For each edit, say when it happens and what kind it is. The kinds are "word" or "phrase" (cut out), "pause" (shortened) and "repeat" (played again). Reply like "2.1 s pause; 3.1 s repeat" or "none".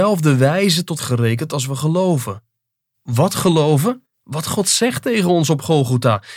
1.0 s phrase; 4.1 s pause